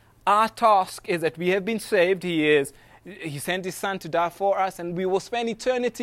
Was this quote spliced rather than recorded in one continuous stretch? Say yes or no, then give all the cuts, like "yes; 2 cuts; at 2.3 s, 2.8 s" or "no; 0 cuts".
no; 0 cuts